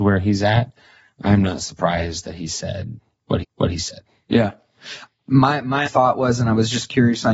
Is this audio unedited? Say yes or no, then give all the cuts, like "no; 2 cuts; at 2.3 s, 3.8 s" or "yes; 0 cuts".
no; 2 cuts; at 3.4 s, 5.9 s